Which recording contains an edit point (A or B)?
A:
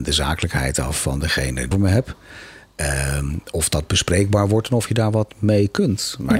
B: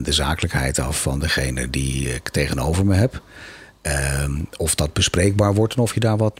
A